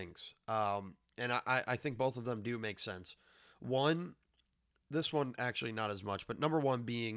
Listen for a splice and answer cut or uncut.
uncut